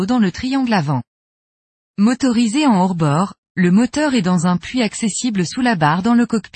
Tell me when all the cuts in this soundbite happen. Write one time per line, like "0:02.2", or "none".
none